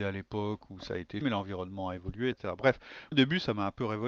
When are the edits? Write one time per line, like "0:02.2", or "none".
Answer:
0:01.2
0:02.3
0:03.1